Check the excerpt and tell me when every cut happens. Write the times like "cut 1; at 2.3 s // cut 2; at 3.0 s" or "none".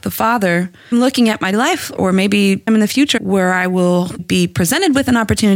cut 1; at 0.9 s // cut 2; at 1.5 s // cut 3; at 2.0 s // cut 4; at 2.7 s // cut 5; at 3.2 s // cut 6; at 4.2 s